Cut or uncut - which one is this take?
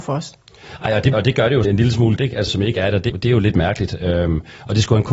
cut